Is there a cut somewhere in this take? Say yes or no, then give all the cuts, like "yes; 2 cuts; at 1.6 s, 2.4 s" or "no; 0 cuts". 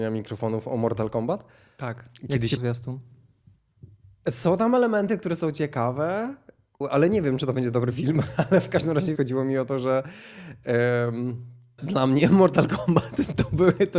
yes; 4 cuts; at 2.6 s, 6.8 s, 9.2 s, 11.8 s